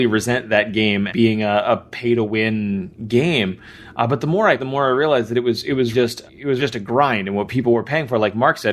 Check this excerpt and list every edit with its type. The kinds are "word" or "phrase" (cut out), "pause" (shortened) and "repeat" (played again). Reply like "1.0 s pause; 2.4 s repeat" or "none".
1.1 s word; 4.6 s word; 5.9 s word; 6.3 s word; 6.6 s word

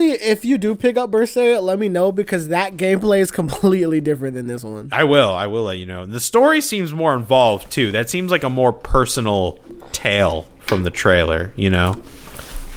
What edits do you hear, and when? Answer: none

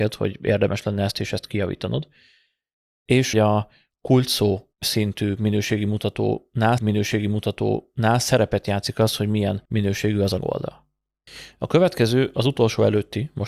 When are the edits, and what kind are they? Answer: 3.3 s phrase; 4.7 s pause; 6.8 s repeat; 9.7 s pause; 10.4 s word

